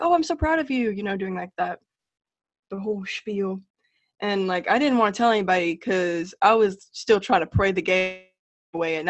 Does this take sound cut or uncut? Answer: uncut